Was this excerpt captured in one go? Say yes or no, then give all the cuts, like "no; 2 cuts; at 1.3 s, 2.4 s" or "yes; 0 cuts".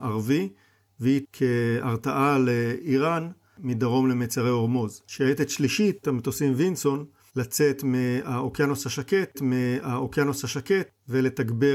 no; 4 cuts; at 1.2 s, 6.0 s, 7.3 s, 9.3 s